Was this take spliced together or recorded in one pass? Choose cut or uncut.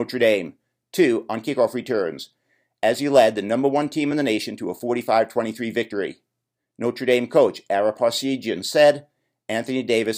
uncut